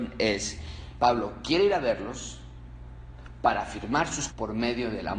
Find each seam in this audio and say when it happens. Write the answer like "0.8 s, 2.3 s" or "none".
4.3 s